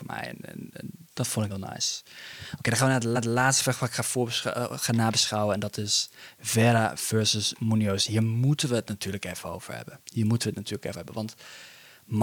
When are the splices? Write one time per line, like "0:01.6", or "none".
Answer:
0:01.1
0:01.5
0:03.1
0:10.0
0:10.9